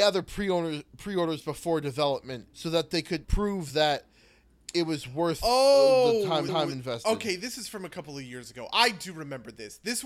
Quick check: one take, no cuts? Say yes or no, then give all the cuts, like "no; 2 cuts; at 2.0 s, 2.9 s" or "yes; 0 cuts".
no; 3 cuts; at 2.5 s, 3.2 s, 6.5 s